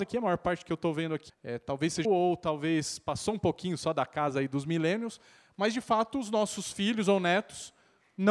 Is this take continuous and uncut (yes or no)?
no